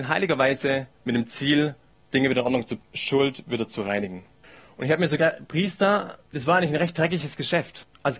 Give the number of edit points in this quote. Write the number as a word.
two